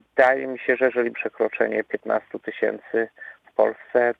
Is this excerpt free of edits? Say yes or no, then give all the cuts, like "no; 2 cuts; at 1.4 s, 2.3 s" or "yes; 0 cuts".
no; 1 cut; at 1.1 s